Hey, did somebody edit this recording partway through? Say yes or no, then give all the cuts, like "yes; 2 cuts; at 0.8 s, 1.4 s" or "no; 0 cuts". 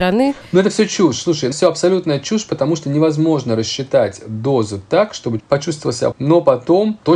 yes; 3 cuts; at 1.5 s, 5.4 s, 6.1 s